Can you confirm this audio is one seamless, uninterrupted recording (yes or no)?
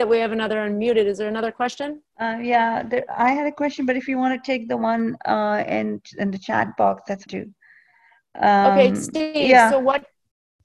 no